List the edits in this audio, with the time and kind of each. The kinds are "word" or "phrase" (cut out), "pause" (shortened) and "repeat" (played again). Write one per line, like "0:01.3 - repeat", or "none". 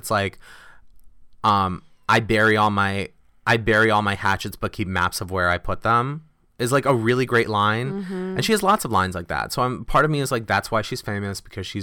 none